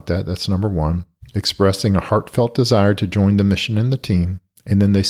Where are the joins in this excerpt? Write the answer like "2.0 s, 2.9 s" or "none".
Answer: none